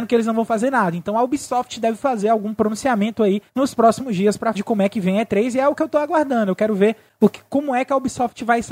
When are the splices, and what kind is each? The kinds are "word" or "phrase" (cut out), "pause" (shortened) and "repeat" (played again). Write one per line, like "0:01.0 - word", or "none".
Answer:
0:03.5 - pause
0:04.5 - word